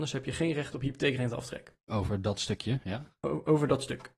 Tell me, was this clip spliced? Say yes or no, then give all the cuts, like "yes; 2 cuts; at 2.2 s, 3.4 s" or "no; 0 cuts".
yes; 1 cut; at 1.8 s